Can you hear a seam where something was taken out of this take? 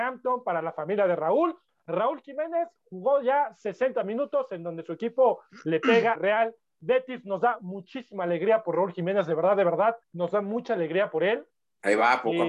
yes; 2 cuts; at 6.1 s, 10.0 s

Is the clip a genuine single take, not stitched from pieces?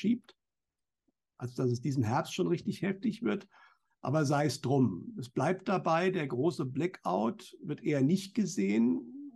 yes; 0 cuts

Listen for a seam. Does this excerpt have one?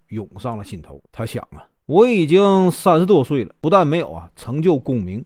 yes; 3 cuts; at 1.1 s, 1.8 s, 3.6 s

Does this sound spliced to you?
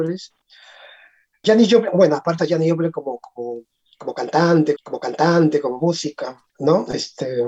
yes; 4 cuts; at 1.4 s, 2.4 s, 4.8 s, 6.5 s

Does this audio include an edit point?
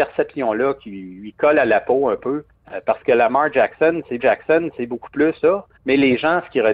yes; 4 cuts; at 2.5 s, 4.2 s, 5.4 s, 5.8 s

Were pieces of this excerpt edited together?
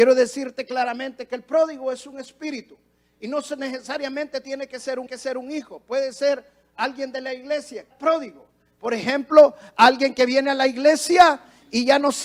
yes; 2 cuts; at 5.1 s, 7.9 s

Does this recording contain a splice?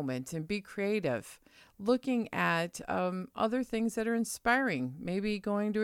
no; 0 cuts

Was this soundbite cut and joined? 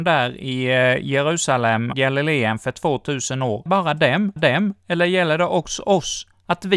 yes; 3 cuts; at 1.9 s, 3.7 s, 4.4 s

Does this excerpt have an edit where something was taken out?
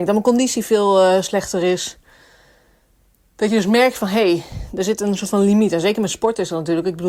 no; 0 cuts

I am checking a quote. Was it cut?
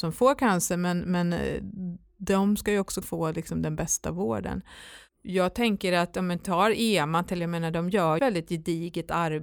yes; 3 cuts; at 3.0 s, 7.4 s, 8.2 s

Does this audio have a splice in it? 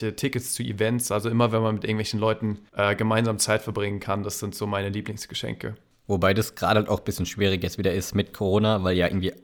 no; 0 cuts

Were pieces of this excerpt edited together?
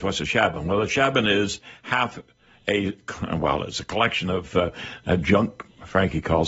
no; 0 cuts

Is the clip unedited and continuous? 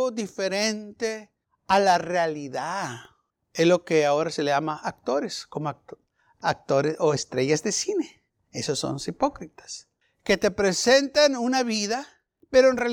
yes; 0 cuts

